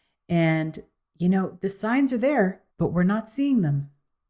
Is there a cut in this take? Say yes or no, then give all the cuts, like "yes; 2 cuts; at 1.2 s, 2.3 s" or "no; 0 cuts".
yes; 1 cut; at 2.7 s